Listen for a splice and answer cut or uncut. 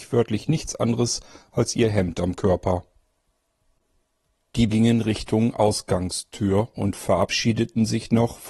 cut